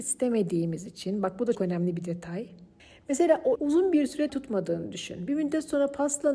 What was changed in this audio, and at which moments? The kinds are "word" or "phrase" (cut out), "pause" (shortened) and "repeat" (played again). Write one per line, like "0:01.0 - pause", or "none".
0:01.5 - word
0:02.8 - pause
0:03.6 - word
0:04.3 - phrase